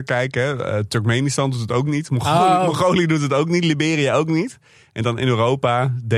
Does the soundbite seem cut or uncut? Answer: uncut